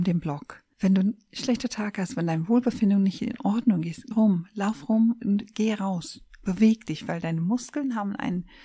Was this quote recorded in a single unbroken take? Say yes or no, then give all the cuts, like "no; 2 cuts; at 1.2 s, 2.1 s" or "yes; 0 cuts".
no; 2 cuts; at 4.1 s, 5.2 s